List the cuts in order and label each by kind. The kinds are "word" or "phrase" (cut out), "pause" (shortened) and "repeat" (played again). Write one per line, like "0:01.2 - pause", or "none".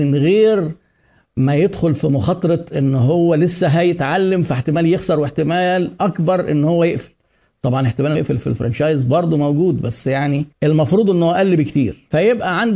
0:08.1 - word
0:10.5 - pause